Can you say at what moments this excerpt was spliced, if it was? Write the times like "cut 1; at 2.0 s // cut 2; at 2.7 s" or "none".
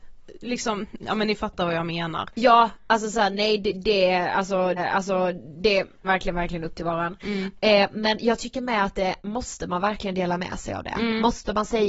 cut 1; at 4.8 s // cut 2; at 6.0 s // cut 3; at 9.2 s

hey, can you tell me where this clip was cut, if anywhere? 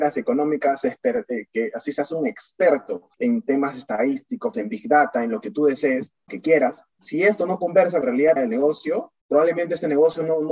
cut 1; at 3.1 s // cut 2; at 4.5 s // cut 3; at 6.3 s // cut 4; at 6.9 s // cut 5; at 8.0 s // cut 6; at 8.4 s

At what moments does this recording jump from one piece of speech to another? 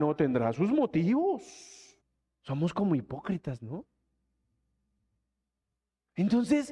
cut 1; at 2.0 s

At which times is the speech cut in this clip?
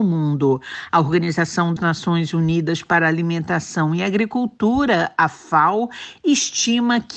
cut 1; at 1.8 s

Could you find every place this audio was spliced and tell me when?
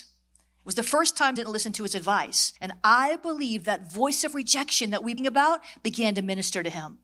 cut 1; at 1.4 s // cut 2; at 2.6 s // cut 3; at 5.2 s

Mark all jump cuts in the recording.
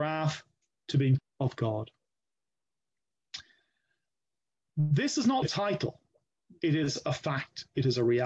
cut 1; at 1.2 s // cut 2; at 5.4 s

